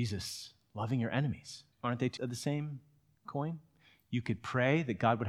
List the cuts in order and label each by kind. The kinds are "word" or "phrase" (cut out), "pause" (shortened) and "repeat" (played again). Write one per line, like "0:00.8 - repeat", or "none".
0:01.7 - pause
0:02.2 - word